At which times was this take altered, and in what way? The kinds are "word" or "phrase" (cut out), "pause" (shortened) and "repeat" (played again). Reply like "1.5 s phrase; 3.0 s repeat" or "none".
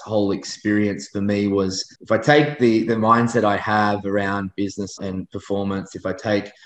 1.9 s pause; 5.0 s word